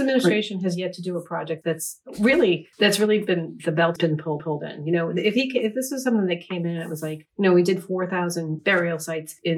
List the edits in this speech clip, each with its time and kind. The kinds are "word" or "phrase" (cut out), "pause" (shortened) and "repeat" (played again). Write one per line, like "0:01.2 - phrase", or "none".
0:01.6 - word
0:02.7 - pause
0:04.0 - word
0:04.4 - repeat
0:07.3 - pause

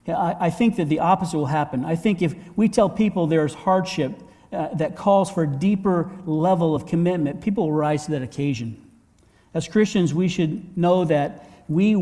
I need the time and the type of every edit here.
none

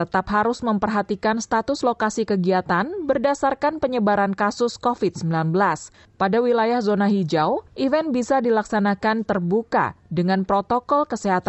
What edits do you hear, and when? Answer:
none

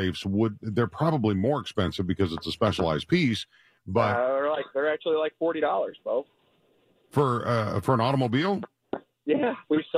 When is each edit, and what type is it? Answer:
none

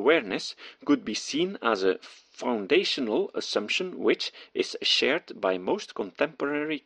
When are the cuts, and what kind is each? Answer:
none

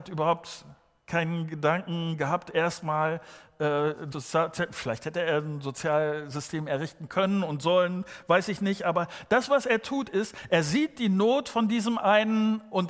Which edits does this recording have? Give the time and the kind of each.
0:04.1 - phrase

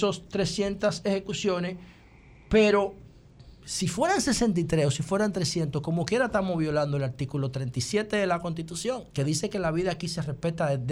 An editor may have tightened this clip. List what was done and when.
0:03.5 - pause
0:09.1 - pause

